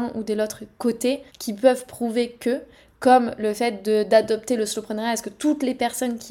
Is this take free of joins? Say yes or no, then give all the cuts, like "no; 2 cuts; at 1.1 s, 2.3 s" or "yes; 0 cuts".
no; 1 cut; at 1.3 s